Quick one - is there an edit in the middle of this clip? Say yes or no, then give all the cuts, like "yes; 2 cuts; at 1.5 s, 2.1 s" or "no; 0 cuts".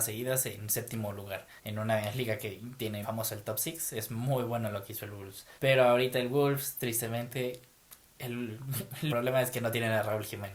yes; 4 cuts; at 1.6 s, 3.0 s, 5.6 s, 9.1 s